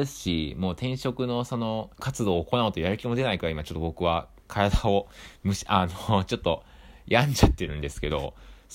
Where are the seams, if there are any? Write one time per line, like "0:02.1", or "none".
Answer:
0:01.9